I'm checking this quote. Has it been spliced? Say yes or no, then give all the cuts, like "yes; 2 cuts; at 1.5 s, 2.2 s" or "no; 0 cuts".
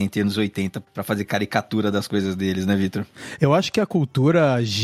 no; 0 cuts